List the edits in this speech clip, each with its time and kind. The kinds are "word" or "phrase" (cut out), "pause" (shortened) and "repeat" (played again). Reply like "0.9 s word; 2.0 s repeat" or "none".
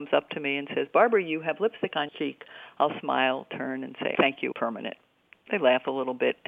2.1 s word; 4.1 s word; 4.5 s word

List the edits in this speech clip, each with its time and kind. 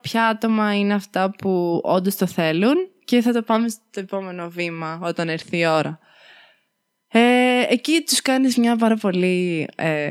none

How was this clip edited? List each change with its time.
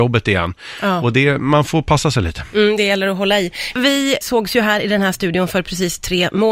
4.2 s word

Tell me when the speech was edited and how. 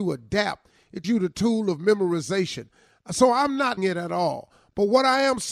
1.0 s word; 3.8 s word

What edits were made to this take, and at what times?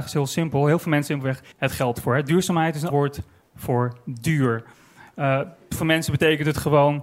1.1 s word; 1.5 s word; 2.9 s word; 5.8 s word

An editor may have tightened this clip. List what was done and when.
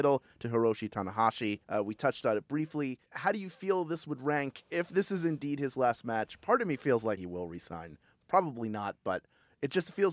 1.6 s pause; 3.1 s pause; 4.6 s word; 7.2 s word

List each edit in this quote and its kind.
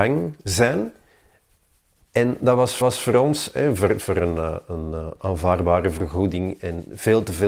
2.8 s repeat

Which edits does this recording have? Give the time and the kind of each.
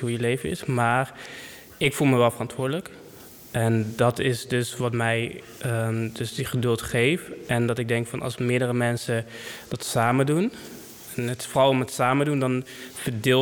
none

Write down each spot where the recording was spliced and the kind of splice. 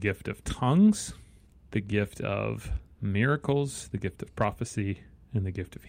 1.5 s pause

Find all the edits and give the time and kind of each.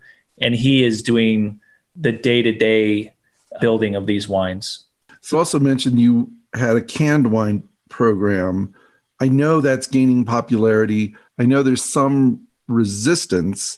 3.6 s word; 5.3 s word; 11.8 s word

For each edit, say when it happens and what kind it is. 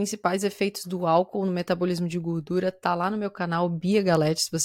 none

